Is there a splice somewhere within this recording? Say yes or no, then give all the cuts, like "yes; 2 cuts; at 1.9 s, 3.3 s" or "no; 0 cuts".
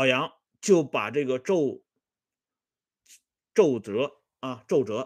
no; 0 cuts